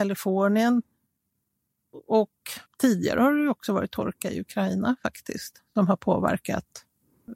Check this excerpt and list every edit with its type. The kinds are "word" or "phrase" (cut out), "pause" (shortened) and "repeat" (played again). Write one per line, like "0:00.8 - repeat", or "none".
0:02.7 - pause